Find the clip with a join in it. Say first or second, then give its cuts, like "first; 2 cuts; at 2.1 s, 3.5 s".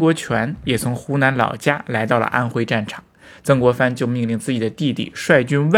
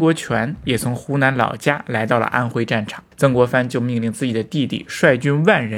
second; 1 cut; at 3.1 s